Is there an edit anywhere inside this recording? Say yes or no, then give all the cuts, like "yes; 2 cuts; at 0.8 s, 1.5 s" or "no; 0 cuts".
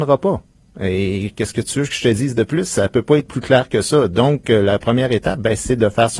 no; 0 cuts